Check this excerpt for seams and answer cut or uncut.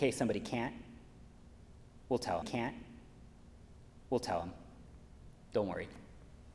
cut